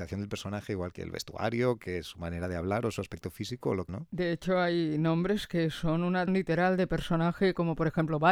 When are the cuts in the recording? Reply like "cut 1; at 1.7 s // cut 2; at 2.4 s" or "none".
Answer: cut 1; at 0.9 s // cut 2; at 3.9 s // cut 3; at 6.3 s